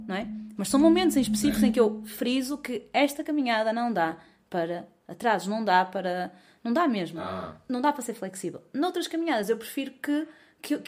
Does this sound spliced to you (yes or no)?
no